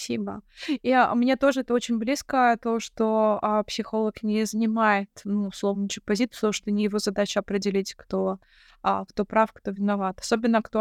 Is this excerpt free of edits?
yes; 0 cuts

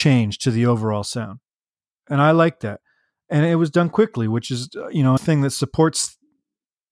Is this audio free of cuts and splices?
no; 1 cut; at 5.2 s

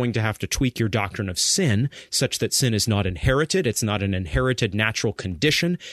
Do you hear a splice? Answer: no; 0 cuts

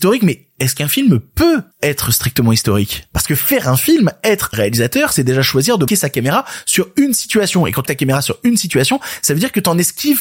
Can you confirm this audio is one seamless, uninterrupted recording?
no; 4 cuts; at 1.7 s, 4.5 s, 5.9 s, 7.9 s

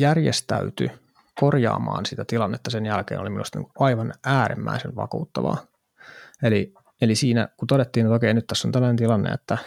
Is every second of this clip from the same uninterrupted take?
yes; 0 cuts

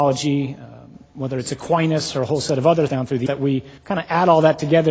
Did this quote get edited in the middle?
yes; 4 cuts; at 2.1 s, 2.9 s, 3.3 s, 3.8 s

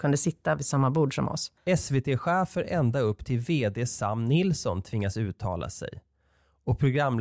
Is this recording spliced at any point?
yes; 1 cut; at 1.6 s

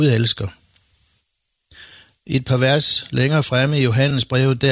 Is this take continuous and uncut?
yes; 0 cuts

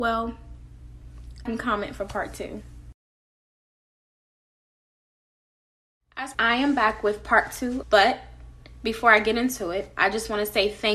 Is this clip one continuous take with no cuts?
no; 3 cuts; at 1.5 s, 6.3 s, 7.8 s

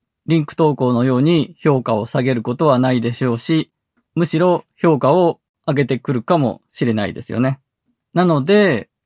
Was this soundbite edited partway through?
no; 0 cuts

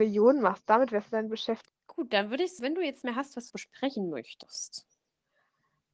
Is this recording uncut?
no; 3 cuts; at 2.6 s, 3.0 s, 3.5 s

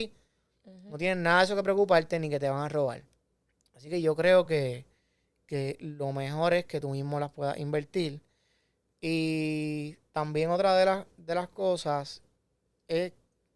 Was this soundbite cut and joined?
no; 0 cuts

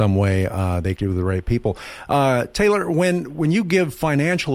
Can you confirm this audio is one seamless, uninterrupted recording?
no; 1 cut; at 1.0 s

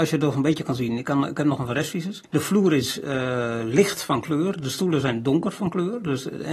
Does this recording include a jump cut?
yes; 1 cut; at 2.3 s

